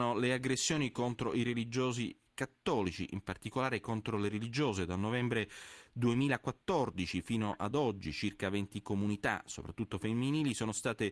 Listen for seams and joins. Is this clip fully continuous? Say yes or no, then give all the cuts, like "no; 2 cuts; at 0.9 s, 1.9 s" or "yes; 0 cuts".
yes; 0 cuts